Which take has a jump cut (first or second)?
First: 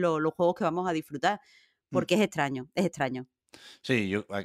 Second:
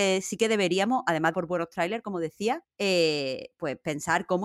second